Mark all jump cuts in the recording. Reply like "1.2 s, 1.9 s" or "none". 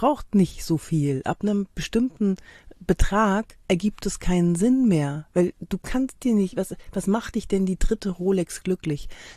3.6 s, 5.3 s